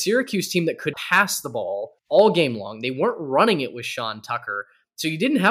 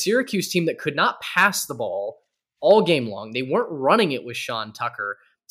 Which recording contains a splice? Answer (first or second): first